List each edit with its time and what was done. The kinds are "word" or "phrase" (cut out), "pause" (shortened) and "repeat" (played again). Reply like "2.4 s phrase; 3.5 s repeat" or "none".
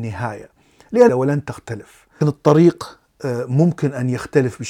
1.1 s phrase; 2.2 s word